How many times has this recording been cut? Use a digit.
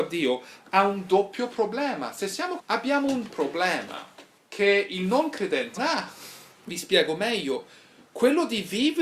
5